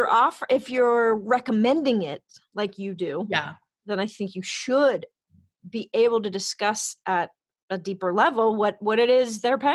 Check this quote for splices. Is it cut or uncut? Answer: uncut